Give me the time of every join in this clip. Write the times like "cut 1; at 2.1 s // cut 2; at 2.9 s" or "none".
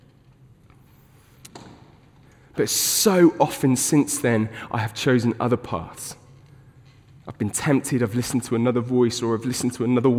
none